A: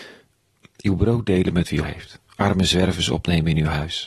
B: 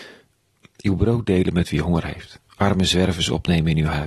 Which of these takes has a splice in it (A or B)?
A